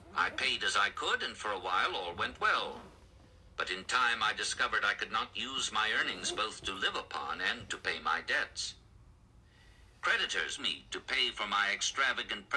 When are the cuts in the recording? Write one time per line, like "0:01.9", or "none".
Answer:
0:10.6